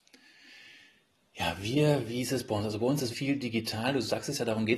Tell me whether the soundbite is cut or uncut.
cut